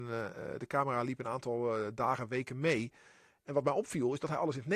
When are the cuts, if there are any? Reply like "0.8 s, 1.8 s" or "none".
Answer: none